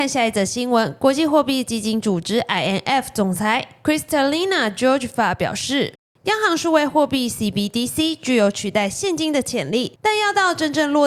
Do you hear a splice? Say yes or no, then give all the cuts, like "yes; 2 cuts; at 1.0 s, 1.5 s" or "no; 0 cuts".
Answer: no; 0 cuts